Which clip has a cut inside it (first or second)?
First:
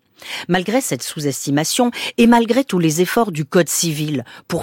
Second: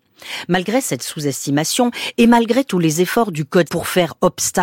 second